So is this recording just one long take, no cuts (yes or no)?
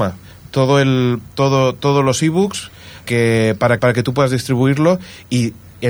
no